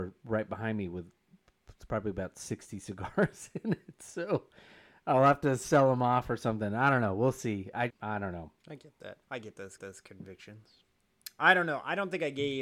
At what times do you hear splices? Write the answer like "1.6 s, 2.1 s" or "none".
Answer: 7.9 s, 8.6 s, 9.2 s, 9.8 s